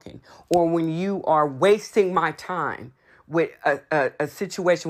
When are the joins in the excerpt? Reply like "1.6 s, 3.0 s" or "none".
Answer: none